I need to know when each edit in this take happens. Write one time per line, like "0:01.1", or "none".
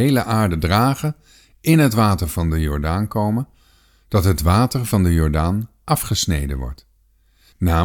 none